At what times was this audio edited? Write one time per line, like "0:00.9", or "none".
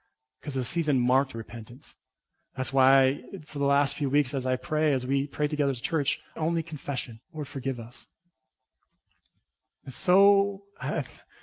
0:01.3
0:06.4
0:07.2